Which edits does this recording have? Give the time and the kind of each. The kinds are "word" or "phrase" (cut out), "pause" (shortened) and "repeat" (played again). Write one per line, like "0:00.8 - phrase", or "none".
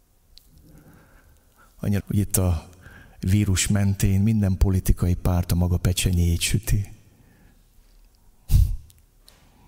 0:02.0 - word